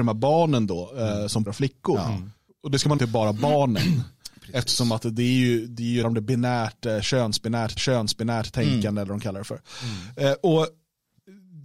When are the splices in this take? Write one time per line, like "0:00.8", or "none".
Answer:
0:01.5
0:02.5
0:03.0
0:06.0
0:07.8